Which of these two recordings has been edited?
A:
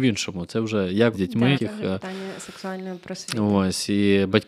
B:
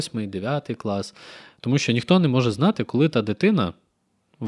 A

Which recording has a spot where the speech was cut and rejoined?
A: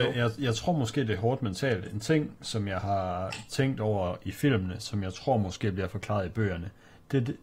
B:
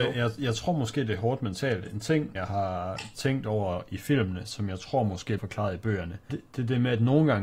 B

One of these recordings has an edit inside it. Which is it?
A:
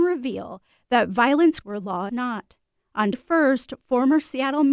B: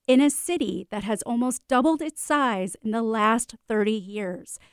A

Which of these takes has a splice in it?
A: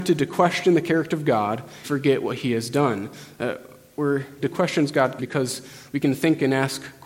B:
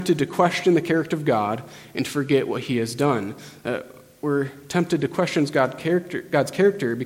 A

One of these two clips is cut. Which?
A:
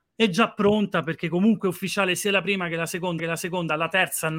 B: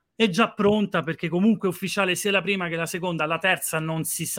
A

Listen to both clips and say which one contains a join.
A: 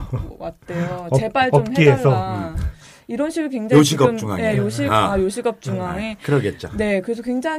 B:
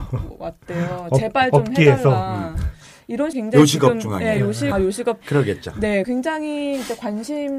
B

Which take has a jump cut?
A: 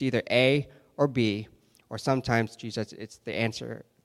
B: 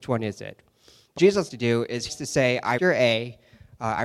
B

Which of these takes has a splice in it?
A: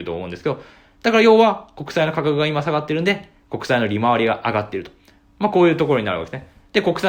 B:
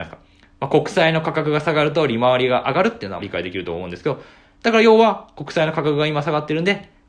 B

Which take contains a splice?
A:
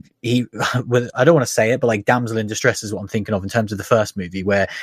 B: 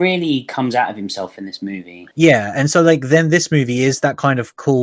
B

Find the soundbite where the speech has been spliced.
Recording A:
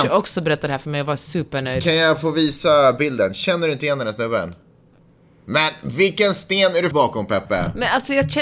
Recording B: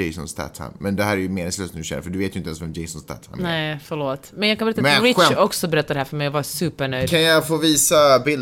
A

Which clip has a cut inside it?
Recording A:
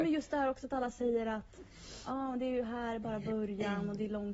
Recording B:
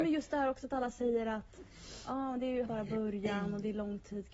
B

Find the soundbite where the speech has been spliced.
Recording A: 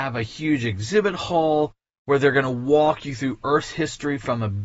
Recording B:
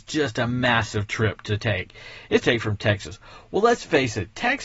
B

